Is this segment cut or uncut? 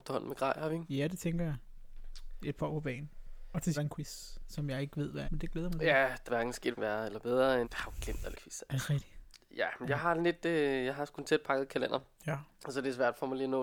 cut